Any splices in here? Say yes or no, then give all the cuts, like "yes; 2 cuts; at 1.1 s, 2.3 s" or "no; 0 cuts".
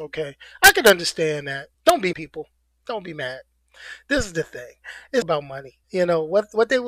yes; 4 cuts; at 1.7 s, 2.1 s, 5.2 s, 5.8 s